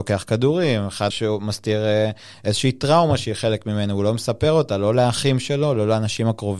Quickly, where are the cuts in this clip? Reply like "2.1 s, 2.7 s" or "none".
1.1 s